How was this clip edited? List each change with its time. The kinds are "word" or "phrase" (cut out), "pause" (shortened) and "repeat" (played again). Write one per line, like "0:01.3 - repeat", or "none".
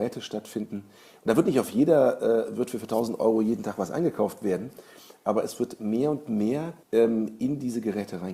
0:06.8 - pause